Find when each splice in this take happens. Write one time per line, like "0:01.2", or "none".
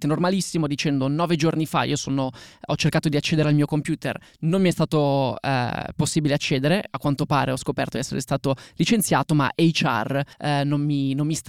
0:10.3